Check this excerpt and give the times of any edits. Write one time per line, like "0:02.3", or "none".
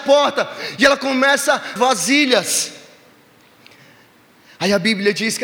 0:01.8